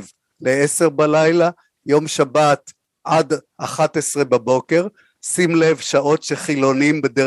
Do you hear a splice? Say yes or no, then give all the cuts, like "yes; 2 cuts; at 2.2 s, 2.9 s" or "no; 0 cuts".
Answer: no; 0 cuts